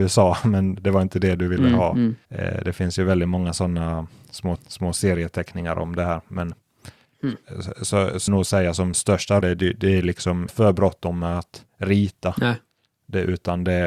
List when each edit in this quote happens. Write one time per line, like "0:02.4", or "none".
0:02.2
0:04.6
0:07.0
0:08.3
0:08.9
0:09.4
0:10.5
0:11.7